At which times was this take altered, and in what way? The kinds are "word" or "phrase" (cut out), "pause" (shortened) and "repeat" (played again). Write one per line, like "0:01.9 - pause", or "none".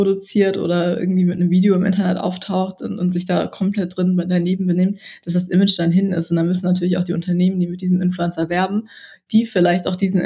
none